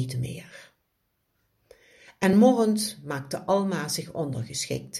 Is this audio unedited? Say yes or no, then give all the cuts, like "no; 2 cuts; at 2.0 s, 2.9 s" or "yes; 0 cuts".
yes; 0 cuts